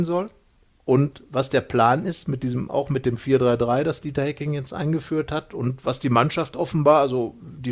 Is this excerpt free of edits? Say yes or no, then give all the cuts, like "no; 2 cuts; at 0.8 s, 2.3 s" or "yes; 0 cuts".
yes; 0 cuts